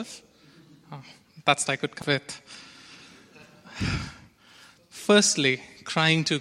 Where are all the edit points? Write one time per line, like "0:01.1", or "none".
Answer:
0:01.6
0:02.0
0:04.8